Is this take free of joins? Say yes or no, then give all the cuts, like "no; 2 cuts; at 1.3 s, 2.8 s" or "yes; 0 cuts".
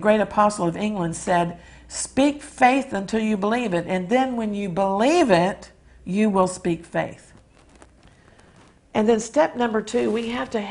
yes; 0 cuts